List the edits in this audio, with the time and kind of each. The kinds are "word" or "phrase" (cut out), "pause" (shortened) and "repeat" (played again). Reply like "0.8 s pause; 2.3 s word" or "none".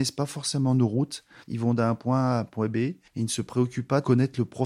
3.1 s pause